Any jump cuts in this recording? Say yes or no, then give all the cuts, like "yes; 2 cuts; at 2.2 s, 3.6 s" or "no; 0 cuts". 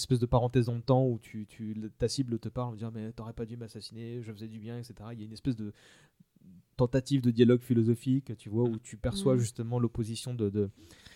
no; 0 cuts